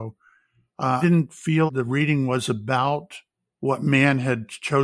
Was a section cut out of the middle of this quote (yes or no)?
yes